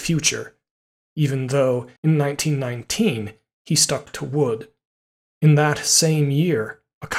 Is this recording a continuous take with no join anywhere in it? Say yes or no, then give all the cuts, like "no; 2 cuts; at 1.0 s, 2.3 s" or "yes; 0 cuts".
no; 1 cut; at 2.0 s